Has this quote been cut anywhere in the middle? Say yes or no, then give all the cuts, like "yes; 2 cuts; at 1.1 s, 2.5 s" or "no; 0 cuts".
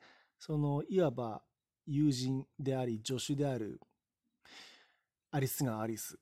no; 0 cuts